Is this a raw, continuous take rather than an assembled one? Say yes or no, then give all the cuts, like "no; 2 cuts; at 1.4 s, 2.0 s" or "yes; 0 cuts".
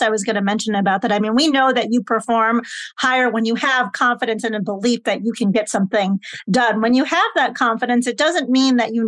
yes; 0 cuts